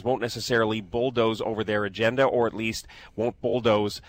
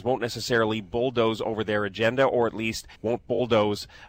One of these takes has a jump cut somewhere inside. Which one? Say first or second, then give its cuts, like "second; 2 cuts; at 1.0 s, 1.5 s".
second; 1 cut; at 2.9 s